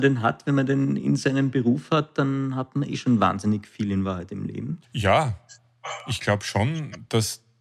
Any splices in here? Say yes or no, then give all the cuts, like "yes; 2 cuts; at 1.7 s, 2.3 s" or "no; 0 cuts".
yes; 1 cut; at 4.8 s